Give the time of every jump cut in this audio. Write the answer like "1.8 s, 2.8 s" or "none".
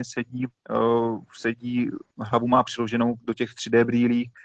none

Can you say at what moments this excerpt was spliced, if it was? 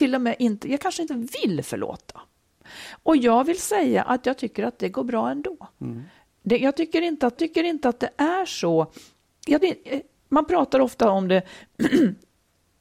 1.1 s, 5.7 s, 7.4 s, 9.6 s

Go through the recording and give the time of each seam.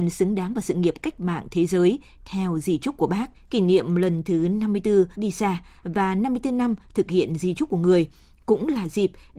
3.3 s, 5.1 s

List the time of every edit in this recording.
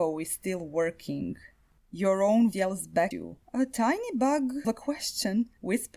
2.5 s, 3.1 s, 4.6 s

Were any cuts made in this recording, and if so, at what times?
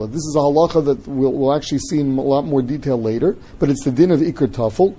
3.5 s

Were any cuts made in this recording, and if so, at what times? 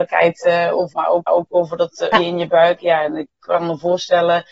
0.9 s, 1.3 s, 2.1 s

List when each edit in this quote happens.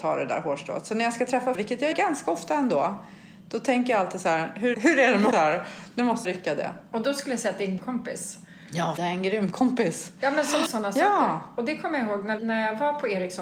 1.5 s, 1.9 s, 4.7 s, 5.3 s, 6.2 s, 7.8 s, 9.0 s, 10.7 s, 12.4 s

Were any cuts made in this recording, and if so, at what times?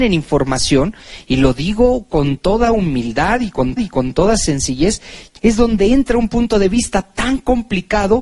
3.8 s, 5.4 s

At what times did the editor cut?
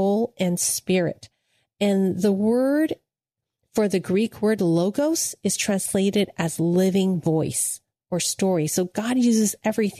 none

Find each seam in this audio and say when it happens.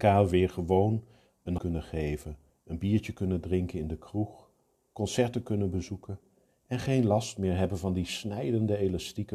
1.6 s, 2.5 s

